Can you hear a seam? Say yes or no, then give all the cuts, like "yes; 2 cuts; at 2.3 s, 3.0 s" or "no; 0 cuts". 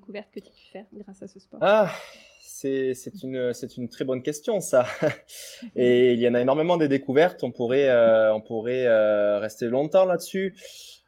no; 0 cuts